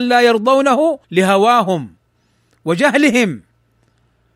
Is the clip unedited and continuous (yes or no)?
no